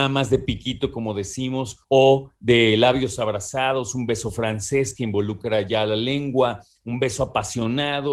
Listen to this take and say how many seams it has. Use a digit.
1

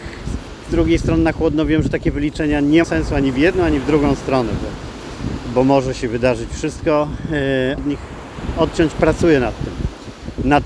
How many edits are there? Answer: 2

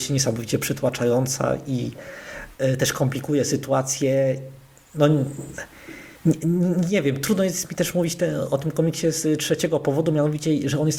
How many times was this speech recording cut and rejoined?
1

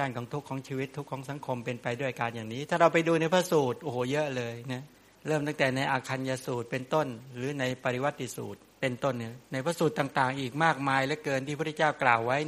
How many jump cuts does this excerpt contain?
2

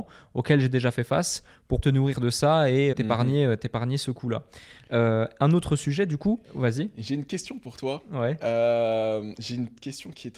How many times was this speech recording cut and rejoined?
3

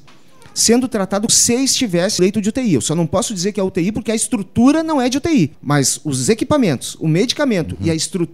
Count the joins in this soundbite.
3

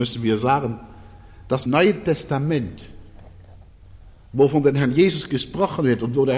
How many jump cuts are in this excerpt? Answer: 1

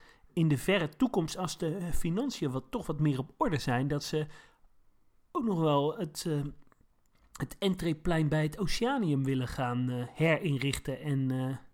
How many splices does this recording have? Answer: 0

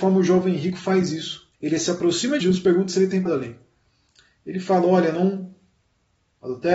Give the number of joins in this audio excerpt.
3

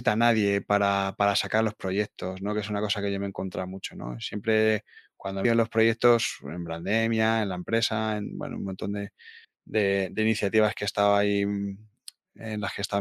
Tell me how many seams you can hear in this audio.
2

